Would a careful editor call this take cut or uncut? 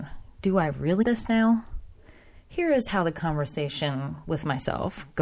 cut